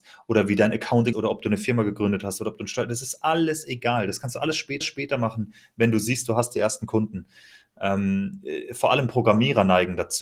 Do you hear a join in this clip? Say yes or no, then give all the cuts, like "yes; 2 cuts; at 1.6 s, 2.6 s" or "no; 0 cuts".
yes; 2 cuts; at 1.1 s, 4.8 s